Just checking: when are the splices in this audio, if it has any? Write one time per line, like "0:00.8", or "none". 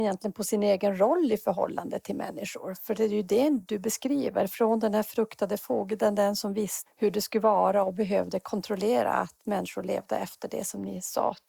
0:06.9